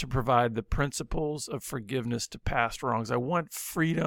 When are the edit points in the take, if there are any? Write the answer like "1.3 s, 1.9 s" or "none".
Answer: none